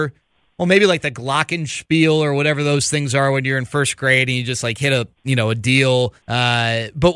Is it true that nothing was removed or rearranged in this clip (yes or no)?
no